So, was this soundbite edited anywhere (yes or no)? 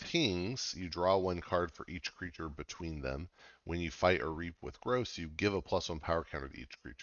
no